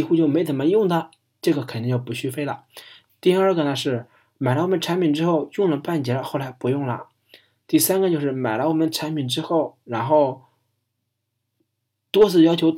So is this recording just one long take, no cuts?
yes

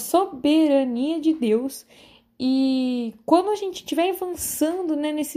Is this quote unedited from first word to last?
yes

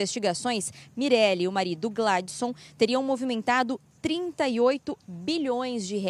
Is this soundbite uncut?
yes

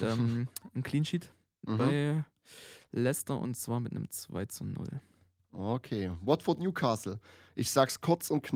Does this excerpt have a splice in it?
no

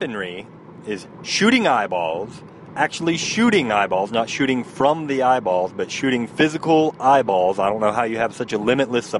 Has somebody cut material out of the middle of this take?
no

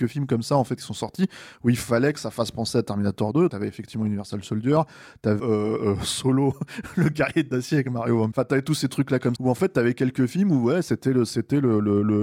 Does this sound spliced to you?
yes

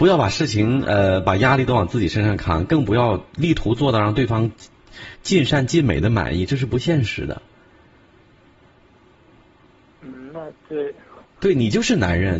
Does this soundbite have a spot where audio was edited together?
no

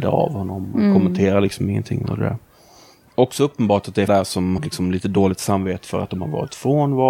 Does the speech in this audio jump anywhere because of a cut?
yes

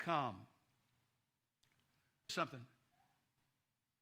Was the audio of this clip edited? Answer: yes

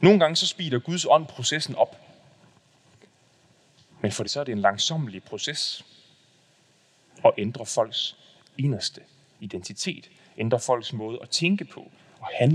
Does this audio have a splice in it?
yes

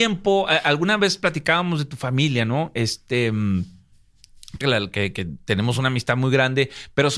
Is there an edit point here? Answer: yes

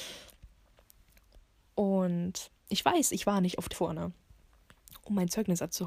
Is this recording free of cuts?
no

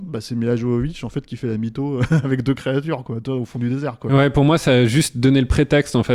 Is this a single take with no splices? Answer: yes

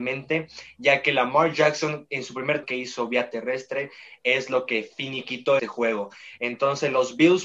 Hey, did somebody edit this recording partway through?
yes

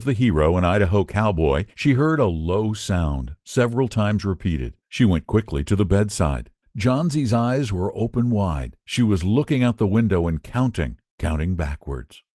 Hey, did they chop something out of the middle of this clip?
yes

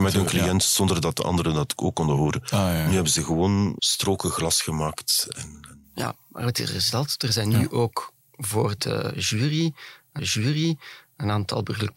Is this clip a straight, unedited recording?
no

